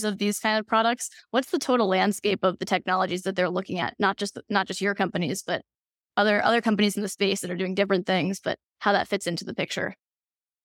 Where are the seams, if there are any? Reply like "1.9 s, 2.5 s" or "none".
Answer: none